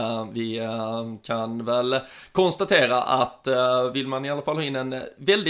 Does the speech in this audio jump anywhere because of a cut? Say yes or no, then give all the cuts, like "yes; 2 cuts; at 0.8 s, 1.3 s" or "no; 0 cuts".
no; 0 cuts